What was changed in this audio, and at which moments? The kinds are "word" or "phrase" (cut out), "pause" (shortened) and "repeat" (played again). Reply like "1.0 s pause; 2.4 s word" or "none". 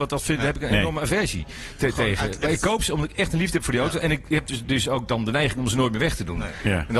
none